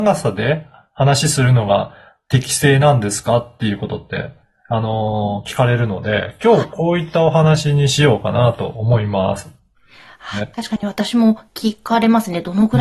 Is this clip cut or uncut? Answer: cut